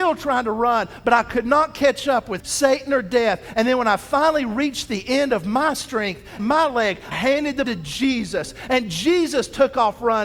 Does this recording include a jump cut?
yes; 4 cuts; at 2.4 s, 6.4 s, 7.1 s, 7.6 s

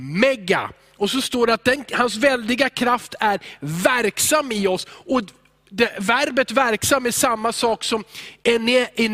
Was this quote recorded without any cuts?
yes; 0 cuts

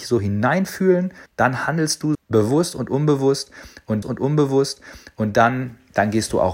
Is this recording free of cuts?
no; 3 cuts; at 1.3 s, 2.1 s, 4.0 s

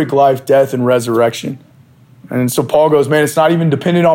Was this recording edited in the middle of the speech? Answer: yes; 1 cut; at 1.7 s

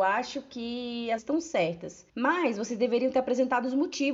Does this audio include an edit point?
yes; 2 cuts; at 1.2 s, 2.1 s

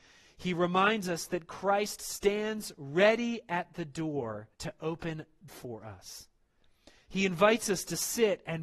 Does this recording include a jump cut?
yes; 2 cuts; at 4.5 s, 5.5 s

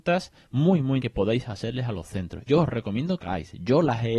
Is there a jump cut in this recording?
yes; 3 cuts; at 1.0 s, 2.5 s, 3.2 s

